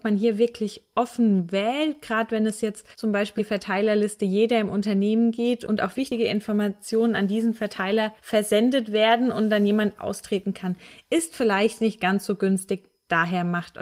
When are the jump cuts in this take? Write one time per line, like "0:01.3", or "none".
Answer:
0:02.9
0:03.4
0:05.9
0:08.2
0:10.0